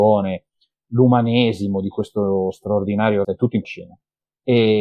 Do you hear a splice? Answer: yes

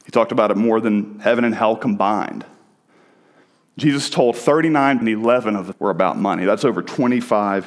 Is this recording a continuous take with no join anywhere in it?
no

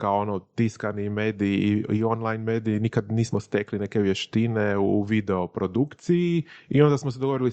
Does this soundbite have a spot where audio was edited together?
no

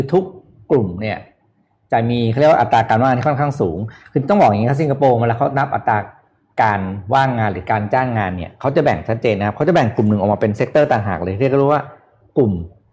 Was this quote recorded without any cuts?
yes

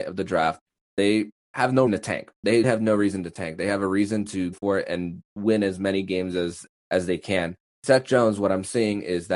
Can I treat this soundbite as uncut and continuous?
no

